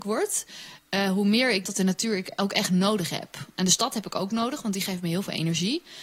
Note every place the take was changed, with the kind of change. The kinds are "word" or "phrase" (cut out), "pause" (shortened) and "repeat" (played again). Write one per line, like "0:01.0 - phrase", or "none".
0:01.6 - word